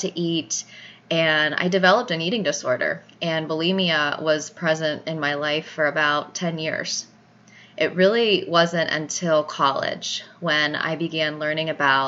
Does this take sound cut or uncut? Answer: uncut